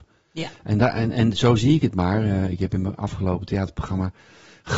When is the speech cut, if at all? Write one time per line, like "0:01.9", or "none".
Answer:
none

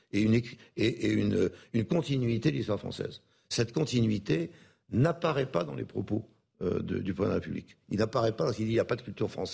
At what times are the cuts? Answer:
none

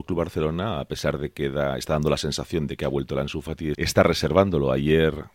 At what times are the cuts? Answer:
0:03.7

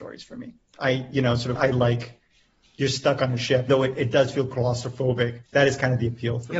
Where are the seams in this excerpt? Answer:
0:01.5
0:03.7
0:05.5

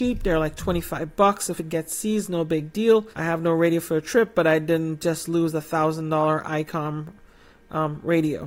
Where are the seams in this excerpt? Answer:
0:01.6
0:03.1

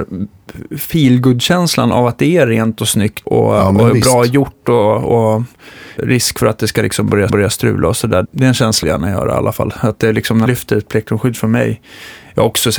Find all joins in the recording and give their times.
0:03.2
0:06.0
0:07.3
0:08.2
0:08.8
0:10.5

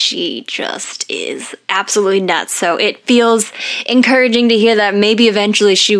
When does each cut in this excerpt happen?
none

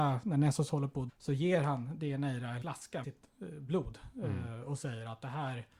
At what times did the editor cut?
0:01.1
0:02.6
0:03.0

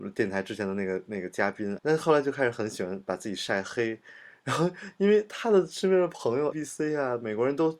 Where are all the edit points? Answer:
0:01.8
0:06.5

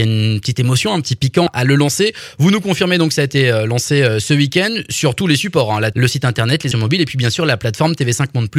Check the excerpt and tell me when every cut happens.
0:01.5
0:05.9
0:06.7

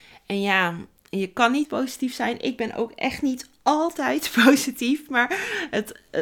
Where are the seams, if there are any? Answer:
0:01.6

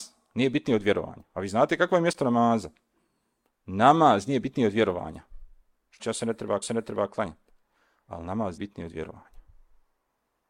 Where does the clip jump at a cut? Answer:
0:06.0
0:06.6
0:08.6

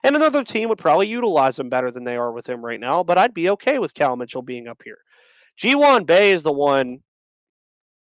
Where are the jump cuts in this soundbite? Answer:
none

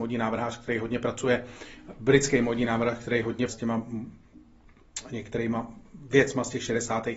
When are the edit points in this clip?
0:03.5

